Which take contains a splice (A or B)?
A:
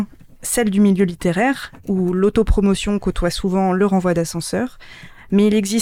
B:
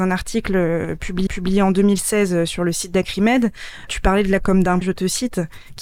B